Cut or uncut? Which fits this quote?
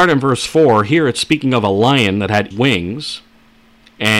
cut